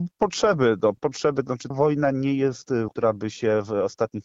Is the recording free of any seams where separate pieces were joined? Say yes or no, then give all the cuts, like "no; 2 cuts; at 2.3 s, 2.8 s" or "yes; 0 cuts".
no; 3 cuts; at 1.0 s, 1.7 s, 2.9 s